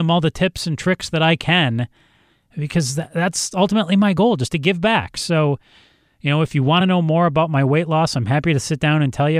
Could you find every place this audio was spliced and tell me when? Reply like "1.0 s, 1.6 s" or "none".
none